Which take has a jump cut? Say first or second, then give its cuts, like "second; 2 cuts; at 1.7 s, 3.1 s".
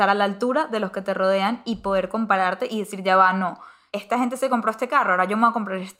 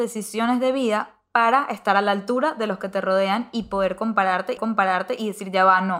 second; 1 cut; at 4.6 s